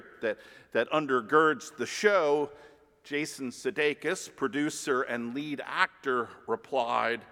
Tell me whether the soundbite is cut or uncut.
uncut